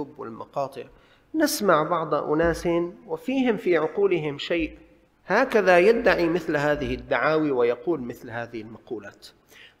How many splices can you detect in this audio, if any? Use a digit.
1